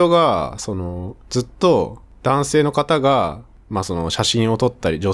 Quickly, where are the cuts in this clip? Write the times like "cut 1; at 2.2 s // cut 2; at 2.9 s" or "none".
cut 1; at 1.2 s

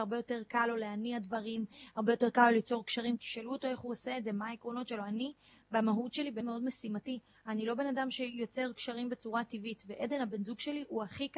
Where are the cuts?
cut 1; at 6.4 s

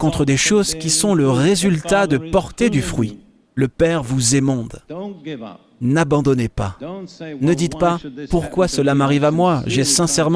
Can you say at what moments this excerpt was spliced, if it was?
none

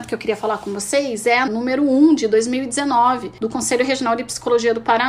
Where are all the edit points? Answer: cut 1; at 1.5 s

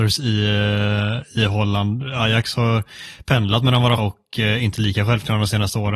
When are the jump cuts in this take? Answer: cut 1; at 4.0 s

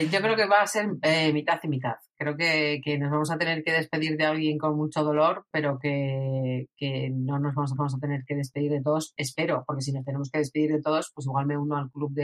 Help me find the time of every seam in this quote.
cut 1; at 7.8 s

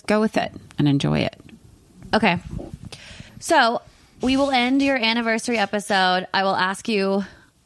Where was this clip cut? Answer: cut 1; at 3.3 s

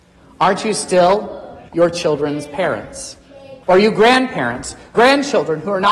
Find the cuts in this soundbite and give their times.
cut 1; at 1.7 s // cut 2; at 3.6 s // cut 3; at 4.9 s

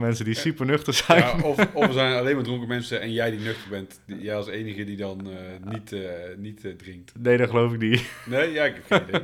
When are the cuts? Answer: none

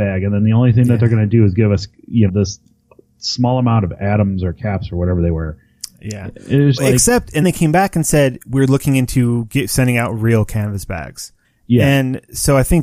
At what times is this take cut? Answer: cut 1; at 2.3 s // cut 2; at 6.8 s // cut 3; at 7.4 s // cut 4; at 11.4 s

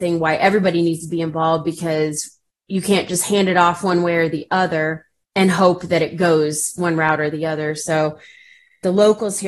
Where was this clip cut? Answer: none

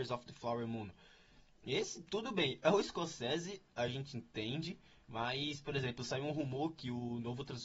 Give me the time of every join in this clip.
none

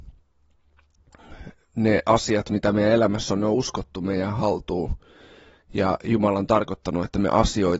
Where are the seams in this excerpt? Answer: none

